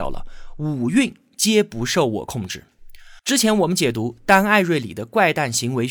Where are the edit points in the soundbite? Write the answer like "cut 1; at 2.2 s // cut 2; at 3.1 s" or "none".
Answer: cut 1; at 3.2 s